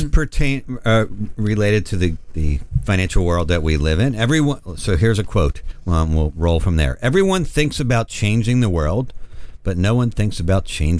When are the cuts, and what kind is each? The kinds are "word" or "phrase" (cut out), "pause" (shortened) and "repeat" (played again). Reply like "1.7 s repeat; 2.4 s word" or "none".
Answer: 2.3 s word

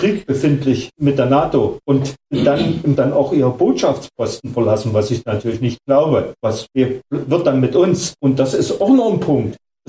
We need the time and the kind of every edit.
3.0 s word

